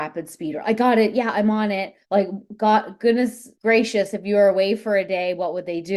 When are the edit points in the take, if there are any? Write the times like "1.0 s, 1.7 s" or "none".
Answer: 2.0 s, 3.5 s